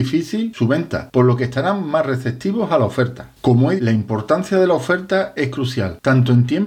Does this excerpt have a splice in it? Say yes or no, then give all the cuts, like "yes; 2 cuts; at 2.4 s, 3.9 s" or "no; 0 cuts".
yes; 1 cut; at 3.8 s